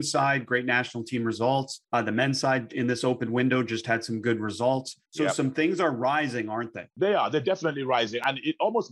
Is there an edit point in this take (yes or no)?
yes